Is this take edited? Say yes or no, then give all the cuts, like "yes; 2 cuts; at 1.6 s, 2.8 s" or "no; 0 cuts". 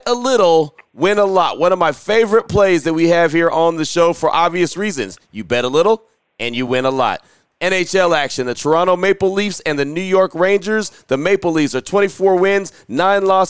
no; 0 cuts